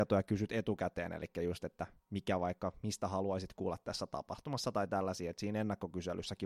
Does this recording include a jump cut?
no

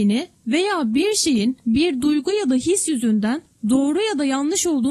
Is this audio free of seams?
yes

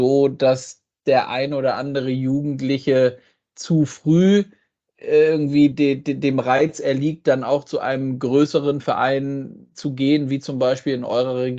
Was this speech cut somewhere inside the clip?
no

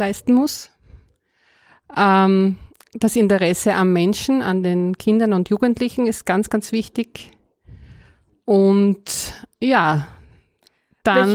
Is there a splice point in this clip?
no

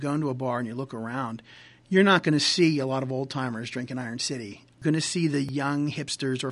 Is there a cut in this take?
no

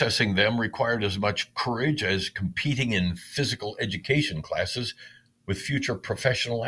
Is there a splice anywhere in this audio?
no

